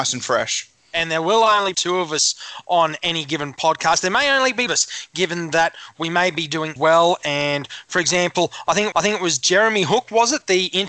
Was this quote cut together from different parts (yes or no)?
yes